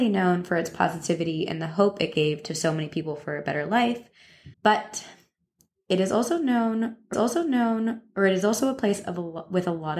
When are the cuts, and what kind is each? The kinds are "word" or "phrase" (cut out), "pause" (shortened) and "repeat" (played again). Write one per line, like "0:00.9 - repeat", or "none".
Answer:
0:04.5 - pause
0:07.1 - repeat